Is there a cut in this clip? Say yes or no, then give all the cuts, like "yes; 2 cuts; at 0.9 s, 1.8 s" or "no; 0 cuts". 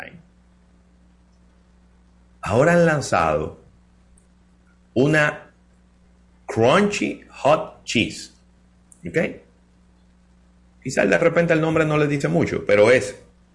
no; 0 cuts